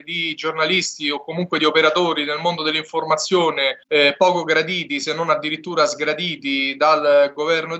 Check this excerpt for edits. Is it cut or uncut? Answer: cut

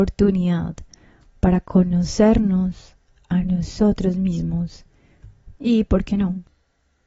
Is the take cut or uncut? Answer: uncut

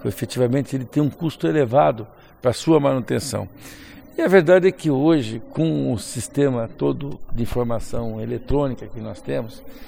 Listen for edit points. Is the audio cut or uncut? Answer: uncut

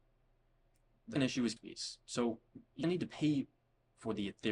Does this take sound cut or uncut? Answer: cut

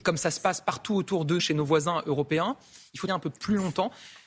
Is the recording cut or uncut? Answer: cut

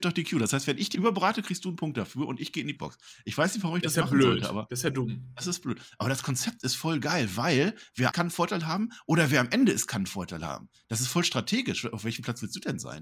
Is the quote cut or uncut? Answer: cut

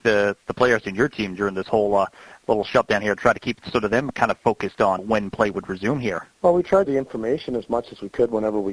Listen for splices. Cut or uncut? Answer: cut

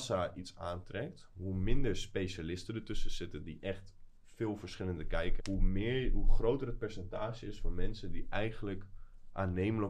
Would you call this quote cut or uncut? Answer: cut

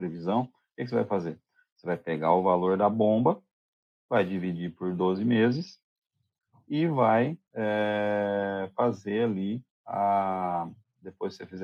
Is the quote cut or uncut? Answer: uncut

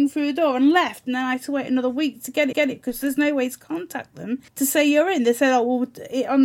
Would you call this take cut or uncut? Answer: cut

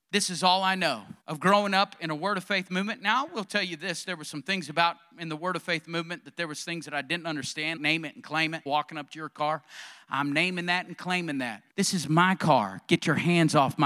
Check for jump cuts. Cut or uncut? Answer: cut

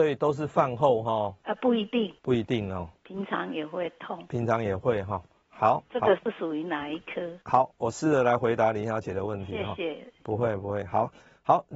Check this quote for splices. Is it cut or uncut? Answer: cut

